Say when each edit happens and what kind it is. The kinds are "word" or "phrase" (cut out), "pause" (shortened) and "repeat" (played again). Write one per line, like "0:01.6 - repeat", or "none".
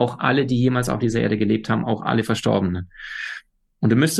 none

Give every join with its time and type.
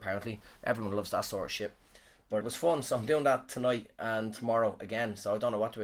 0:02.4 - word

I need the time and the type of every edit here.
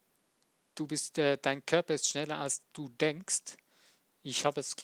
none

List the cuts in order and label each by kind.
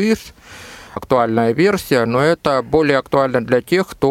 0:01.0 - word

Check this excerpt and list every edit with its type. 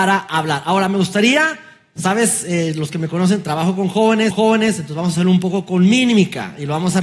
0:04.3 - repeat

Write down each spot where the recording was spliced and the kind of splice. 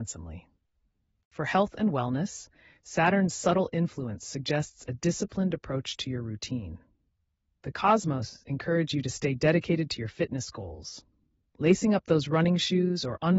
none

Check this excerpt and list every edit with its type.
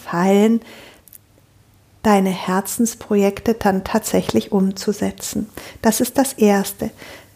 none

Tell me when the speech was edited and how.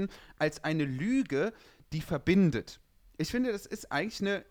none

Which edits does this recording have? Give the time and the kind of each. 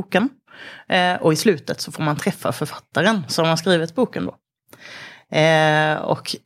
none

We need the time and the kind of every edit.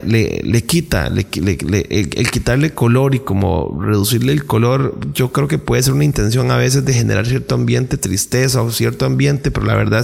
none

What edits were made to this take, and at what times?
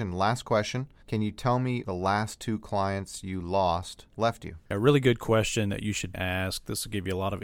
0:01.0 - pause
0:01.8 - word
0:04.1 - pause
0:04.6 - pause
0:06.1 - word

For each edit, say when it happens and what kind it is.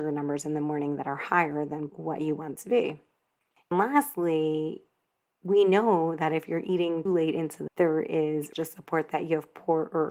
0:01.9 - word
0:02.5 - word
0:03.7 - word
0:07.1 - word
0:07.7 - word
0:08.5 - word

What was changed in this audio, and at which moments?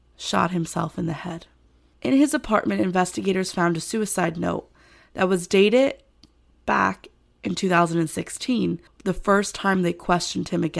0:08.9 - pause

